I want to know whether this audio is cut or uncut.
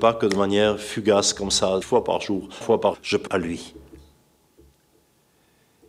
cut